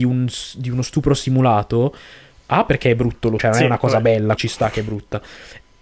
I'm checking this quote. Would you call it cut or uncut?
cut